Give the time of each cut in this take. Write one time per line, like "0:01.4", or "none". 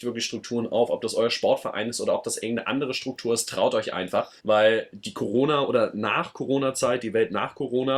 0:04.4